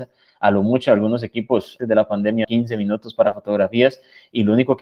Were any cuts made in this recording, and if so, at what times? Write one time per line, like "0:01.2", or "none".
0:01.8
0:02.4

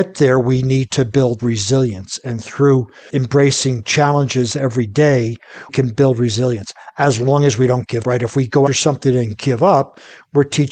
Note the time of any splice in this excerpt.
0:01.4
0:03.1
0:05.7
0:08.0
0:08.7

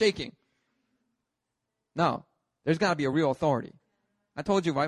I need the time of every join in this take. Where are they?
none

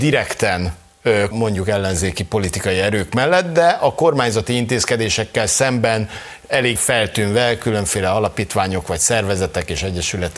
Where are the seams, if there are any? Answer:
0:01.3
0:06.8

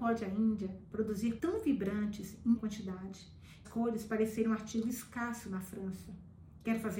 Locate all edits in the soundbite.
0:01.4
0:02.6
0:03.6

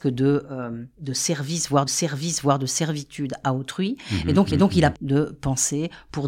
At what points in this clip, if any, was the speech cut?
0:01.9
0:04.5
0:04.9

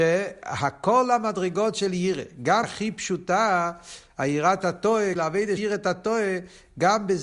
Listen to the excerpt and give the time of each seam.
0:02.6
0:05.2
0:05.6

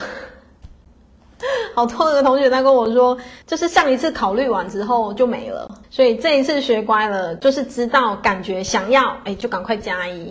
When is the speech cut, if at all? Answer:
0:03.4
0:05.8

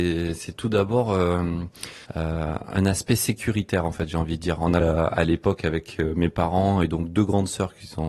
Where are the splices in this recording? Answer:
0:02.1
0:04.8

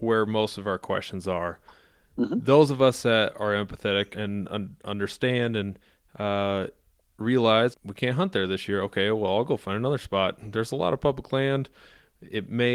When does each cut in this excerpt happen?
0:04.1
0:07.7

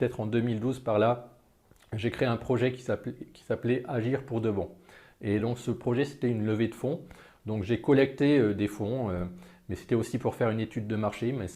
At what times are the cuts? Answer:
none

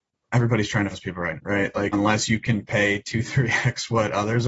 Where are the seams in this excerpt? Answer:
0:00.9
0:01.3
0:01.9

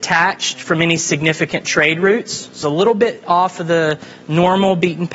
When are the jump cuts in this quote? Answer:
0:02.6

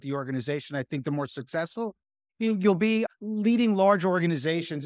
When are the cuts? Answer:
none

